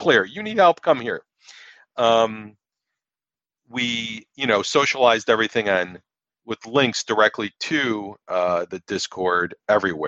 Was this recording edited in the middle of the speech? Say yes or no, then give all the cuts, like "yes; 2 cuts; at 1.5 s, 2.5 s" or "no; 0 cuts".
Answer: no; 0 cuts